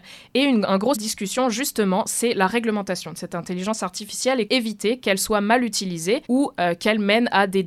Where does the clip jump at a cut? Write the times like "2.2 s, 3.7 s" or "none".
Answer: 0.9 s, 4.5 s, 6.3 s